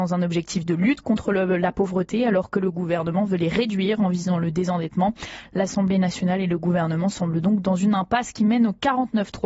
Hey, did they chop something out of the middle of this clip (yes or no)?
no